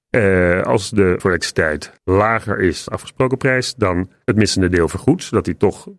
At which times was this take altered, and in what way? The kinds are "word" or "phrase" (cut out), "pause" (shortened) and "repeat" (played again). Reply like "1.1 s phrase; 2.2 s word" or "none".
1.2 s word; 2.0 s pause; 2.9 s word; 4.3 s phrase